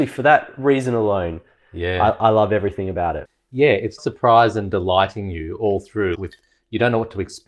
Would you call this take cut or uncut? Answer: cut